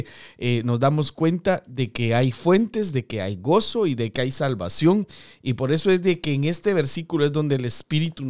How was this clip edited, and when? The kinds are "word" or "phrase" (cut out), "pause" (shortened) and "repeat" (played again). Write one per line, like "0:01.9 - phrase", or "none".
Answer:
none